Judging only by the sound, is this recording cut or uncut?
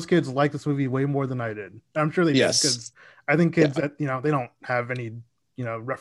uncut